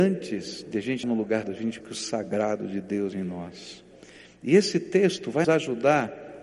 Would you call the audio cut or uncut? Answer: cut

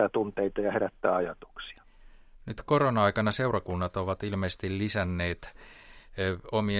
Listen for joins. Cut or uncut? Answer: uncut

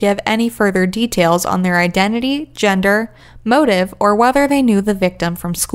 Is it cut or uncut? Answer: uncut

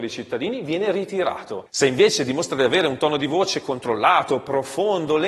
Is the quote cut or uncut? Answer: uncut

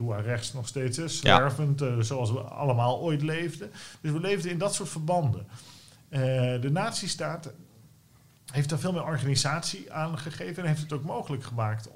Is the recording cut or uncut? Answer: uncut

